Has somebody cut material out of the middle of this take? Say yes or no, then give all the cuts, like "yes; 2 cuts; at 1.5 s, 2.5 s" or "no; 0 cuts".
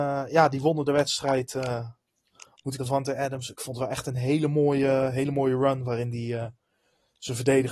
yes; 1 cut; at 2.8 s